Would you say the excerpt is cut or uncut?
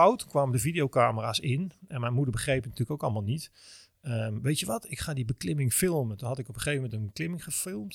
uncut